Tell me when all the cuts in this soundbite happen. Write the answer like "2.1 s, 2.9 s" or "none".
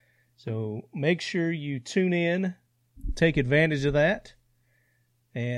none

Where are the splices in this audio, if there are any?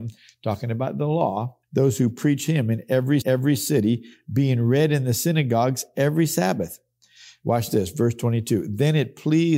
1.6 s, 3.2 s

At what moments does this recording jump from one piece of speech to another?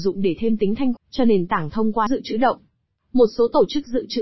1.0 s, 2.1 s

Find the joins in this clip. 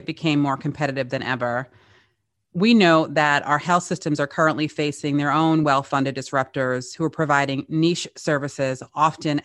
none

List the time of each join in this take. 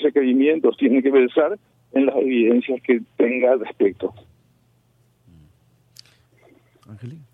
none

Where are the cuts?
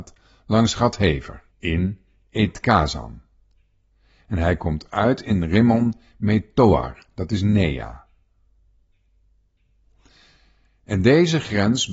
none

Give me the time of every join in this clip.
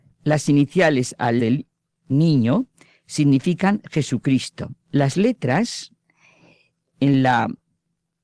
1.4 s, 1.9 s, 4.8 s

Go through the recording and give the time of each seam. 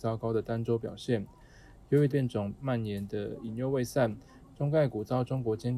2.1 s

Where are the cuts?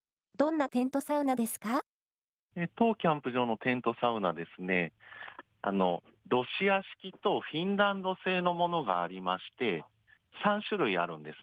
none

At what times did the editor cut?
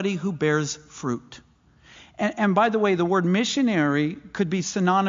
none

